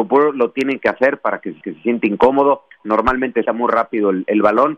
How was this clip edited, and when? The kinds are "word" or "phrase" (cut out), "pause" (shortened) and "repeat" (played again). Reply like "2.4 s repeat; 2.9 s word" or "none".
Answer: 1.6 s repeat; 3.5 s word